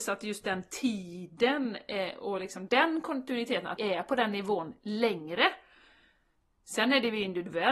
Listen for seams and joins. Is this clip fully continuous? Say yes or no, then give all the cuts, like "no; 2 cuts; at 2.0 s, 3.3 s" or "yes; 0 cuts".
no; 2 cuts; at 2.7 s, 3.8 s